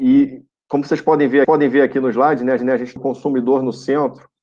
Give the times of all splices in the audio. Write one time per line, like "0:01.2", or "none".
0:01.4
0:02.6
0:03.0

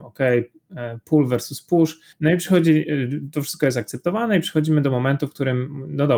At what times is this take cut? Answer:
0:02.1

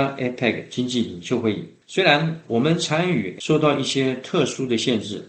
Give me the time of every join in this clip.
0:03.4

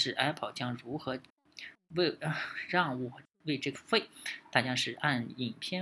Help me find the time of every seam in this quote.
0:03.7

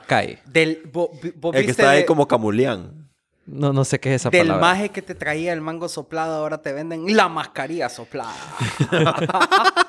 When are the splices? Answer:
none

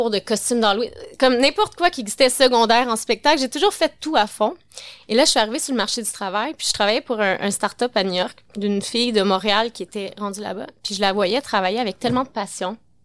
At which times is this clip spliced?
0:08.5

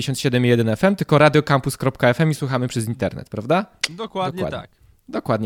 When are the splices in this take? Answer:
none

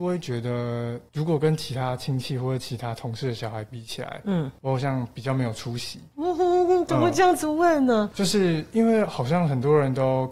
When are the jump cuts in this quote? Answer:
none

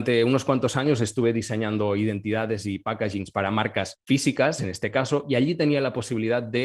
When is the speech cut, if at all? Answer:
none

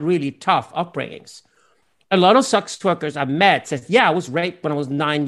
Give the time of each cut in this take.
none

